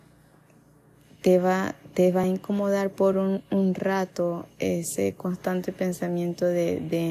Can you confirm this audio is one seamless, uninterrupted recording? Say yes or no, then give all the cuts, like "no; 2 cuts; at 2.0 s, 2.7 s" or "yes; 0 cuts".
yes; 0 cuts